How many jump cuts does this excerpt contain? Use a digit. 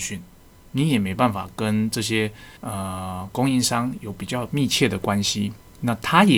1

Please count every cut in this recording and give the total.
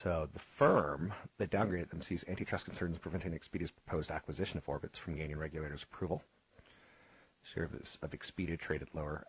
0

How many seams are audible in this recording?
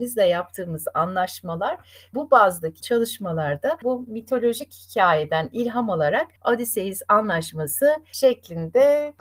3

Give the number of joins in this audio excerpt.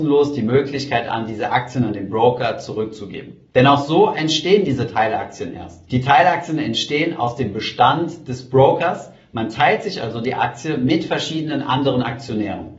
0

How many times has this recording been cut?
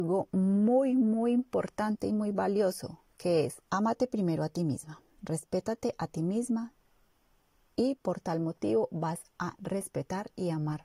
1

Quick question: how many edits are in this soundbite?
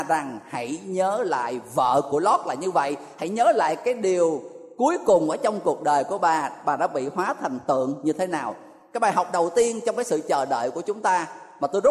0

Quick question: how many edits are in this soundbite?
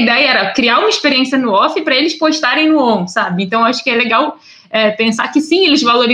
0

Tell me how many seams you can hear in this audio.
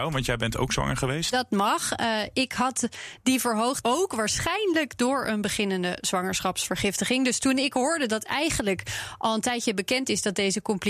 1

